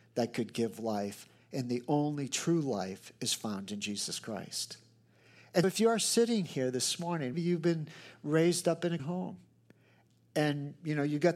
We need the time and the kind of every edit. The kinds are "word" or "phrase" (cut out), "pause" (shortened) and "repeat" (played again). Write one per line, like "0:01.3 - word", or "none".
0:05.6 - word
0:07.3 - word
0:09.0 - word